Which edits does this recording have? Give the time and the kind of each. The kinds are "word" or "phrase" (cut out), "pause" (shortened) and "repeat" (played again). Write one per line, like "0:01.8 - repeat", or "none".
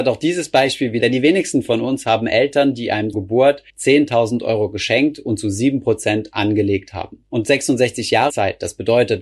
0:01.0 - phrase
0:03.1 - word
0:03.7 - pause
0:08.3 - phrase